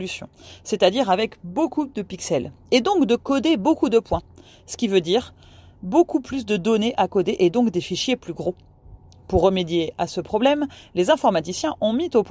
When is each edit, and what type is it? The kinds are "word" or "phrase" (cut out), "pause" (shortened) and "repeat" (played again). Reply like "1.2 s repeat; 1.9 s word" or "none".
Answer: none

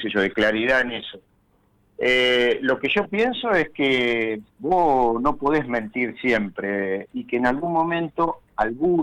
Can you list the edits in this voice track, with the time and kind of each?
4.5 s pause

